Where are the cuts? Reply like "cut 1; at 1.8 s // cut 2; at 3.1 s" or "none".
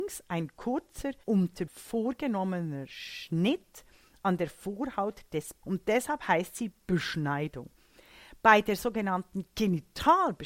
cut 1; at 1.2 s // cut 2; at 1.7 s // cut 3; at 5.6 s